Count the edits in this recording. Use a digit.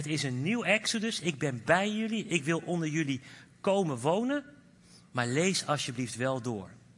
1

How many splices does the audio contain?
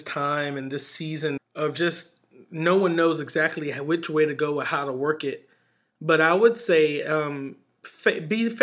1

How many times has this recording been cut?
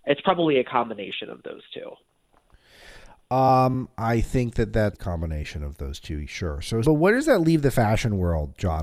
2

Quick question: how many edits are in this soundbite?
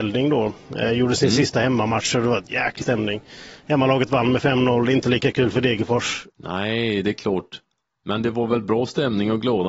1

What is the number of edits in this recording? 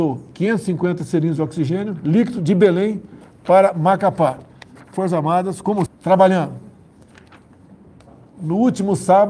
2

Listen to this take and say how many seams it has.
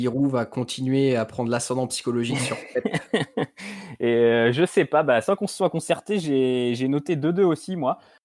0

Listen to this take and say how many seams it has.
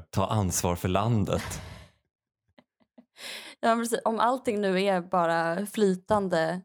0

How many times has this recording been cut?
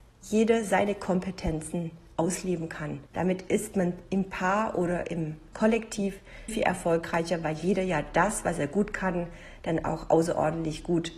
2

